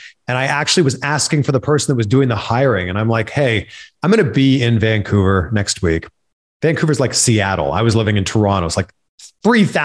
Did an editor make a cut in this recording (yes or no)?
no